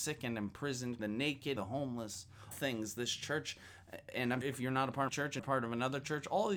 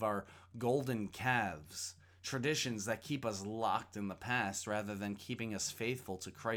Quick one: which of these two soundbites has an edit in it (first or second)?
first